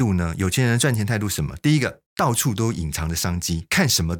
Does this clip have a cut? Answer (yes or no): yes